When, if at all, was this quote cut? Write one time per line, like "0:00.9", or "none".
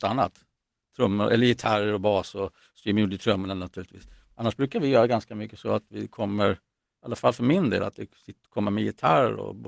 none